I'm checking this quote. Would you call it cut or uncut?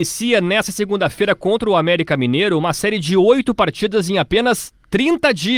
uncut